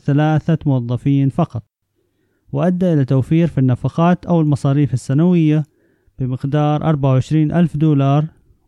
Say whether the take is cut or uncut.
uncut